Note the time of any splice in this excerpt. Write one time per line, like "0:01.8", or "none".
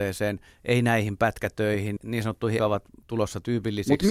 0:02.0
0:02.6